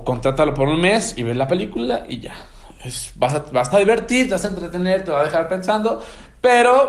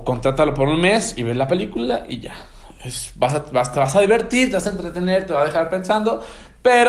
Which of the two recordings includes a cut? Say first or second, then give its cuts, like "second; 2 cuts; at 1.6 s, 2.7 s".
first; 1 cut; at 3.7 s